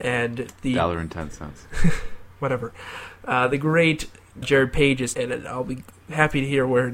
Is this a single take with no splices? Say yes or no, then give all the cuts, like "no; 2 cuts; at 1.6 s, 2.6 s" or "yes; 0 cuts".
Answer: no; 2 cuts; at 4.4 s, 5.1 s